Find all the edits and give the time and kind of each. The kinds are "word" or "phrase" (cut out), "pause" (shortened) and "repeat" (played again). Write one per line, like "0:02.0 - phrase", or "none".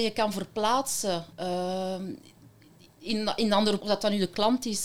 0:01.3 - pause
0:03.8 - word